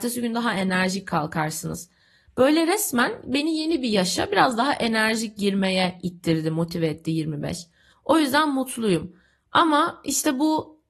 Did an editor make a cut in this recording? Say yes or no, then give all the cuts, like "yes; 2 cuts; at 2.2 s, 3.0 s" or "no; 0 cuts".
no; 0 cuts